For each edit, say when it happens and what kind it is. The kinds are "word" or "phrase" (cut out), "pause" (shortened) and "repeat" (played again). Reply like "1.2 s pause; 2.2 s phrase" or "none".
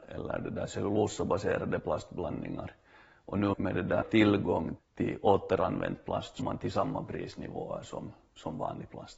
3.5 s word; 4.0 s word; 4.8 s word; 6.4 s word